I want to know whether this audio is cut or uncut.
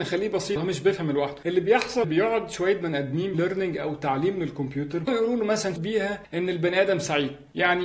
cut